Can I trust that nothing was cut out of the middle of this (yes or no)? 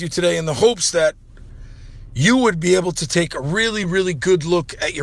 yes